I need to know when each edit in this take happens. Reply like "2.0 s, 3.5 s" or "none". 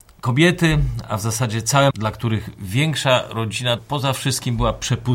1.9 s, 3.8 s